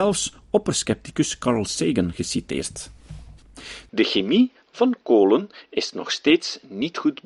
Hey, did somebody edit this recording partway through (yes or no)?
no